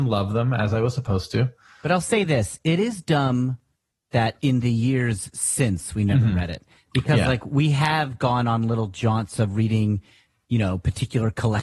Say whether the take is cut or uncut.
uncut